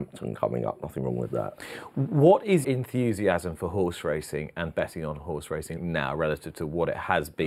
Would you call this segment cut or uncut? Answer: cut